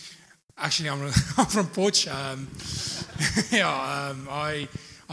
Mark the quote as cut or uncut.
uncut